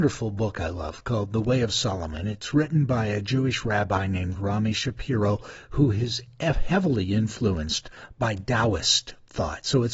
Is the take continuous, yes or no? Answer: yes